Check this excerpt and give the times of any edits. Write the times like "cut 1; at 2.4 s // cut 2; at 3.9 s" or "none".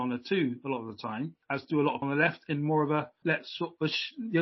cut 1; at 1.4 s // cut 2; at 2.0 s // cut 3; at 3.2 s